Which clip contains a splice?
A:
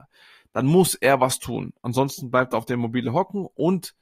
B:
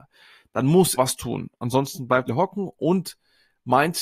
B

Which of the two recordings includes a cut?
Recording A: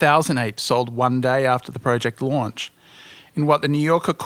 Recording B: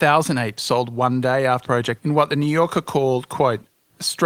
B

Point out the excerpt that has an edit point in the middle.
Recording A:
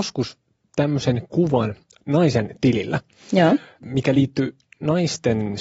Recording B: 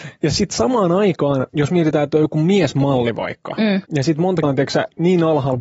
B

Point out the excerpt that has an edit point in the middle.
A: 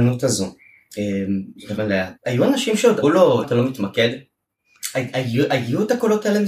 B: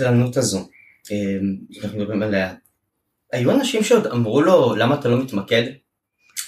A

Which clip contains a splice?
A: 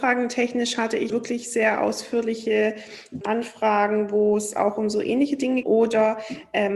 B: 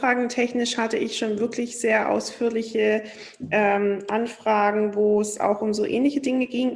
A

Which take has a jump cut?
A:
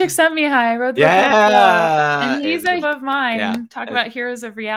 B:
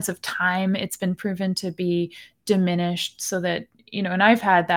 A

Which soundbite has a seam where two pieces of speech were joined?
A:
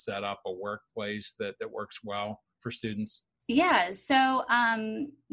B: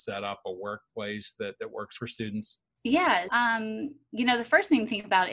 B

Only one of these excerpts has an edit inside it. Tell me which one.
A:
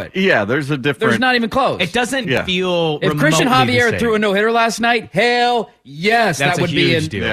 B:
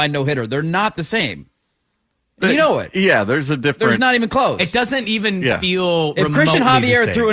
A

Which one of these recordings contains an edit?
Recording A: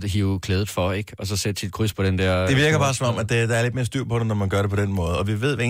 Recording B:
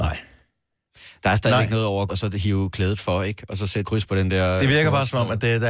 B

